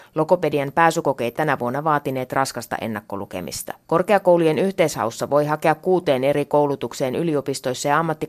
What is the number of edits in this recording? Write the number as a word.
two